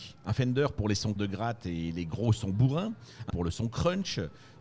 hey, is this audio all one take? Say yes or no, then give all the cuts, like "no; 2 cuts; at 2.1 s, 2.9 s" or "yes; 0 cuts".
no; 2 cuts; at 1.2 s, 3.3 s